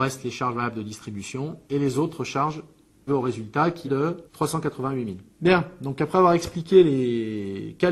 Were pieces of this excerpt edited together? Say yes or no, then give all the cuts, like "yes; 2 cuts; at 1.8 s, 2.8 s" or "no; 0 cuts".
yes; 5 cuts; at 1.6 s, 3.1 s, 3.8 s, 4.3 s, 5.3 s